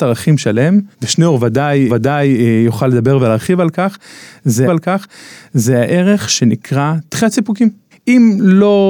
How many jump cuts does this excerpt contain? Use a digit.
4